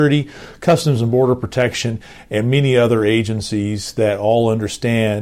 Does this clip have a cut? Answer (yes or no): no